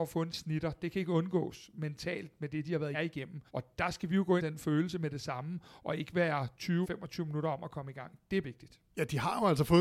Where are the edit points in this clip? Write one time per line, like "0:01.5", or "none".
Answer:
0:02.9
0:03.5
0:04.4
0:06.8
0:08.4
0:08.9

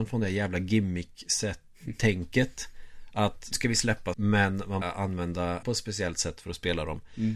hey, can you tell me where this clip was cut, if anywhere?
0:03.5
0:04.1
0:04.8
0:05.6

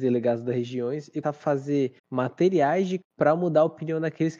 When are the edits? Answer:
0:01.2
0:02.0
0:03.0

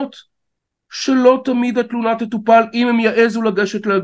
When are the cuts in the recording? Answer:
none

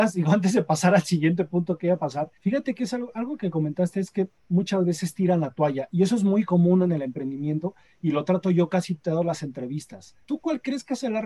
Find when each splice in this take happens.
0:02.4
0:04.4
0:10.2

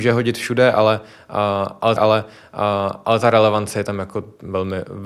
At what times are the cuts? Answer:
0:02.0

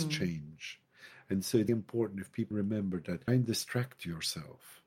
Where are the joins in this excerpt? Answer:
0:01.7
0:02.5
0:03.3

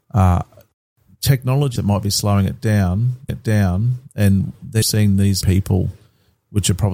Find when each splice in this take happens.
0:01.8
0:03.3
0:04.8
0:05.4

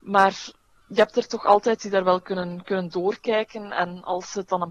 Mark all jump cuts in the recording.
none

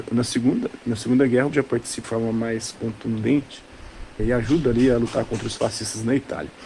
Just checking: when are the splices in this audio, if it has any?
0:01.5
0:02.0
0:04.2

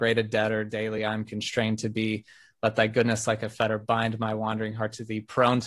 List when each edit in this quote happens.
none

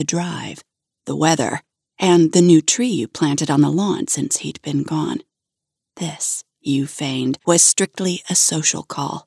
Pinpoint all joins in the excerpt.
0:07.4

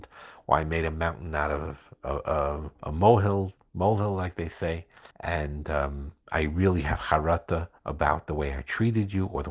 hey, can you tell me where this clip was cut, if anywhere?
0:02.8
0:05.1
0:06.2
0:07.8

